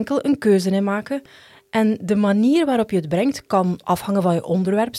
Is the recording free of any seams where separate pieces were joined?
yes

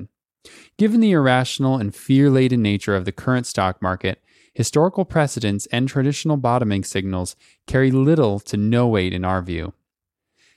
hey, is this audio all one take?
yes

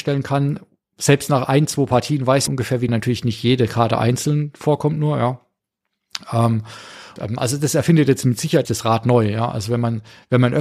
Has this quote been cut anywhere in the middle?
yes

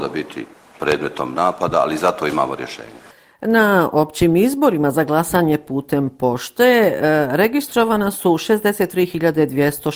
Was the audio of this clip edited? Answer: no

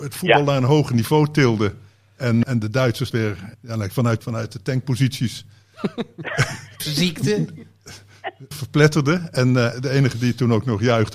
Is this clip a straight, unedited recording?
no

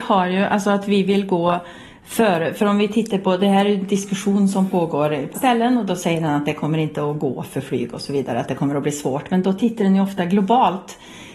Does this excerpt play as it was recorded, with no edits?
no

